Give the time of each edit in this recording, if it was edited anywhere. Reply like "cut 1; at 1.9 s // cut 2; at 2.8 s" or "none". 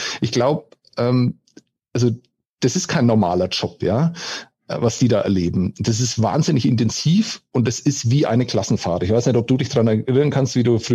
none

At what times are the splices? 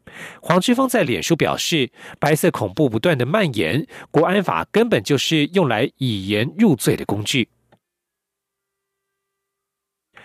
none

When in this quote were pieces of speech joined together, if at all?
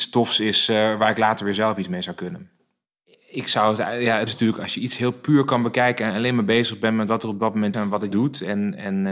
cut 1; at 4.3 s // cut 2; at 7.7 s // cut 3; at 8.1 s

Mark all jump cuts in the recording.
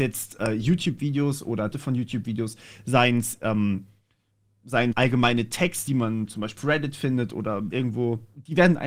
cut 1; at 1.7 s // cut 2; at 4.9 s // cut 3; at 5.9 s // cut 4; at 6.6 s // cut 5; at 7.7 s

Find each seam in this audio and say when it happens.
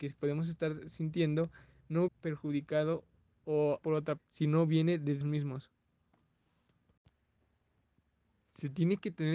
cut 1; at 2.1 s // cut 2; at 3.8 s // cut 3; at 4.2 s // cut 4; at 5.2 s

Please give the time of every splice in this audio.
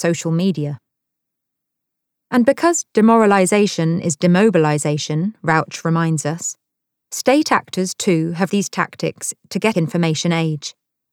cut 1; at 8.5 s // cut 2; at 9.7 s

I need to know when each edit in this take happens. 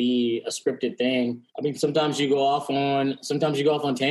cut 1; at 1.5 s

